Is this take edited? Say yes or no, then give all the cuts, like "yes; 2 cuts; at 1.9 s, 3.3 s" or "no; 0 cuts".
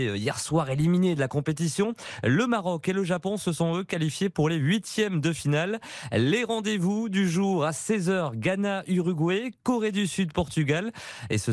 no; 0 cuts